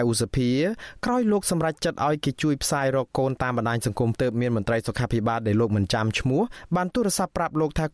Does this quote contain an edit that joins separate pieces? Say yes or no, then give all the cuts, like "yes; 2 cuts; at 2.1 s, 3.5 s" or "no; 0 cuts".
yes; 1 cut; at 4.1 s